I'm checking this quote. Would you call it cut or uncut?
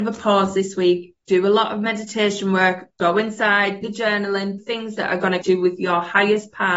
cut